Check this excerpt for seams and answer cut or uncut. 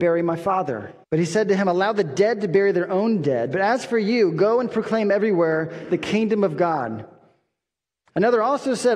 cut